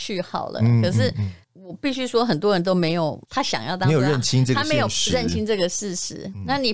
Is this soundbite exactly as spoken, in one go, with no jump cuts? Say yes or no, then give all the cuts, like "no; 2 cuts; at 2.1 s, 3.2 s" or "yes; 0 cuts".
no; 2 cuts; at 1.4 s, 3.2 s